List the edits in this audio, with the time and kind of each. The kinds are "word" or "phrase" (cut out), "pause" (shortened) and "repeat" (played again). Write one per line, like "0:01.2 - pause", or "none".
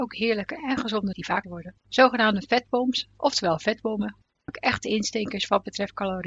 0:01.1 - word
0:01.4 - word
0:01.8 - pause
0:04.5 - word